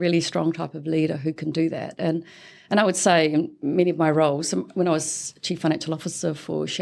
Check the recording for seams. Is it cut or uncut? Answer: uncut